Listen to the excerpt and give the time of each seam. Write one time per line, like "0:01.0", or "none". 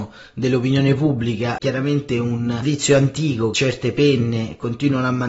0:01.6
0:03.5